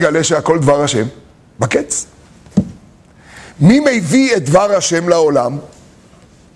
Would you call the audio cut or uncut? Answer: uncut